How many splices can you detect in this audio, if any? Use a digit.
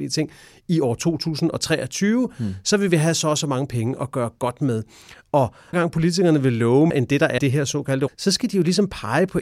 4